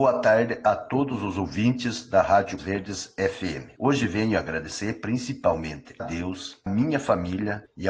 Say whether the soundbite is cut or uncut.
cut